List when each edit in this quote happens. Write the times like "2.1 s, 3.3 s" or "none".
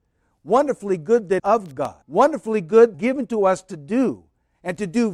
1.4 s, 2.0 s, 2.9 s